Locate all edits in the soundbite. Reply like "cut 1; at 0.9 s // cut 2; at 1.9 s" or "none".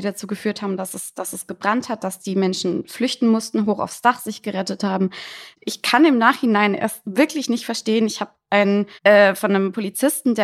cut 1; at 5.5 s // cut 2; at 9.0 s